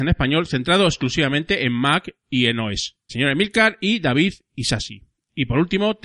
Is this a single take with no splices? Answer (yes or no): no